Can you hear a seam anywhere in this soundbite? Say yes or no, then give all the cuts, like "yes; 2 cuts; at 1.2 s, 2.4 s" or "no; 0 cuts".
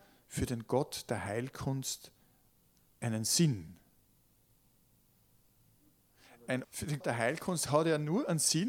yes; 2 cuts; at 6.6 s, 7.0 s